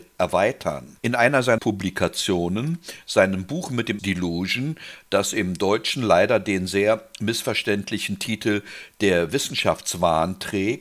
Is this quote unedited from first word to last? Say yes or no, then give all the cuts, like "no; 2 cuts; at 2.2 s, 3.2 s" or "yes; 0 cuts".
no; 3 cuts; at 1.0 s, 1.6 s, 4.0 s